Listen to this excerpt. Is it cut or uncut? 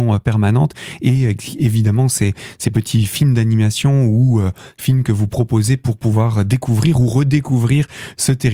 uncut